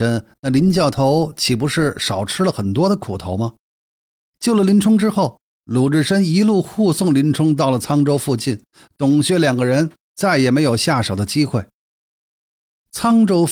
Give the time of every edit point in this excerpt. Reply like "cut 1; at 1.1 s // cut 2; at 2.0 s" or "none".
cut 1; at 5.6 s